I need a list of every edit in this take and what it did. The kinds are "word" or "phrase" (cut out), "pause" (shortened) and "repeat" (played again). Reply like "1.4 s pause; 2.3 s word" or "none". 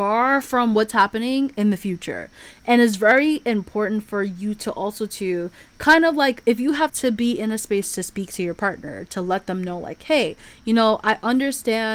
6.9 s phrase